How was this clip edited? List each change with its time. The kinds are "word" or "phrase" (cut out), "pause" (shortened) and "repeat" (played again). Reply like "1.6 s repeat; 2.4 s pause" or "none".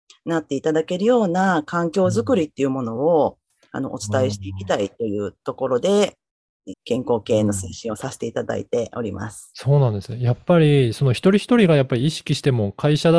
6.7 s word